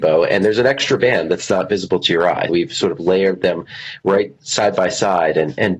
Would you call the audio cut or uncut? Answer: cut